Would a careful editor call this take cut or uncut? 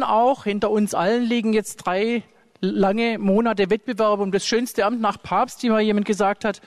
uncut